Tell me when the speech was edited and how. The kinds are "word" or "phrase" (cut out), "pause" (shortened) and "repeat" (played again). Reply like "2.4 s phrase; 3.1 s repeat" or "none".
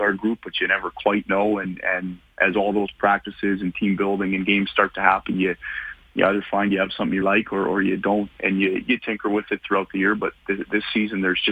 7.2 s word; 8.3 s word